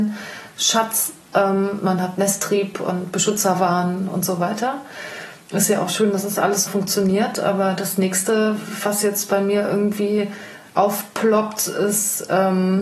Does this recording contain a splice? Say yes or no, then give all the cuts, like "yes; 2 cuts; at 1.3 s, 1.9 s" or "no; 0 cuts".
yes; 2 cuts; at 5.4 s, 6.7 s